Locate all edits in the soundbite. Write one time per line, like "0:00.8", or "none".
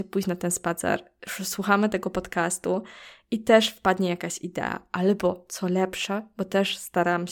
none